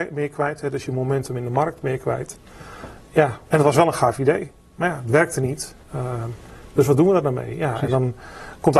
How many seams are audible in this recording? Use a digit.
1